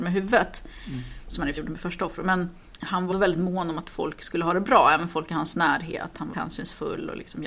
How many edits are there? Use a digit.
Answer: 3